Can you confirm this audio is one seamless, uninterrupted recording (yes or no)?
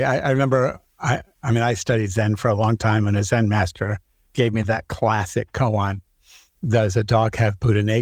yes